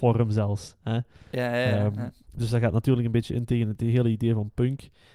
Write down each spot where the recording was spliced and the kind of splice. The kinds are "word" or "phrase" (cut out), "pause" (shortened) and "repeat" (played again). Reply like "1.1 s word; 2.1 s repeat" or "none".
none

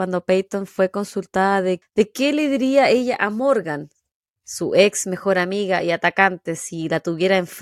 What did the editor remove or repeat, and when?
1.8 s word

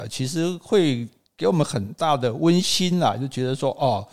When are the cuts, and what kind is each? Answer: none

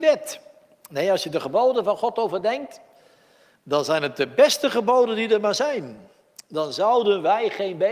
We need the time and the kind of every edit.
none

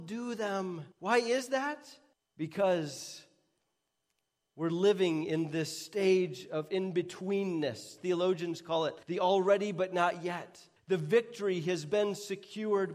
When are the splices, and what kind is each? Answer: 0.9 s pause; 2.1 s pause; 9.0 s pause; 10.8 s pause

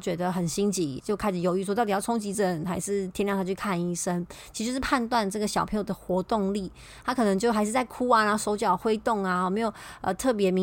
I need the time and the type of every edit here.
1.0 s word

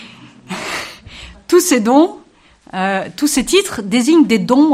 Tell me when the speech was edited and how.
none

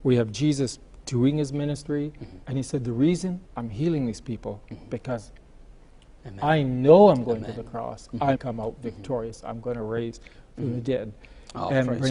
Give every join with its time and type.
2.4 s pause; 3.5 s pause; 8.4 s phrase

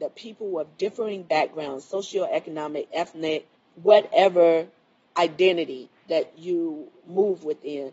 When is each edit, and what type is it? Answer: 3.5 s pause

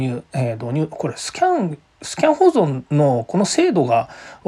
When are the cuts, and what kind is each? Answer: 2.9 s pause

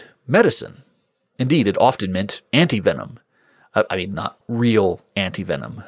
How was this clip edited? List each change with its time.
3.9 s word

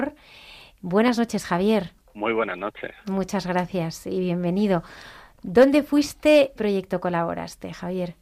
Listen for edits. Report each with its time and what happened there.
2.0 s pause; 6.6 s phrase

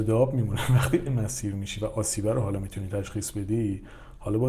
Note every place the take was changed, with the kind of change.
1.1 s word

